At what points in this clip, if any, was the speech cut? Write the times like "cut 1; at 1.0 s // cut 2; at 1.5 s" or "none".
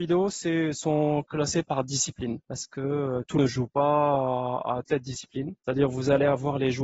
cut 1; at 2.4 s // cut 2; at 3.4 s // cut 3; at 4.9 s // cut 4; at 5.6 s